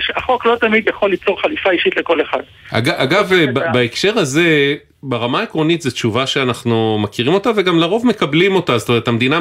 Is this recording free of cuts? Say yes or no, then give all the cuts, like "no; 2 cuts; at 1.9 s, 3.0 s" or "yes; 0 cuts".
yes; 0 cuts